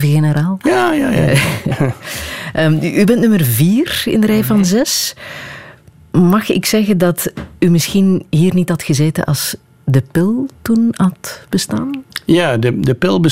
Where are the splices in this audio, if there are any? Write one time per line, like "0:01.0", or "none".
none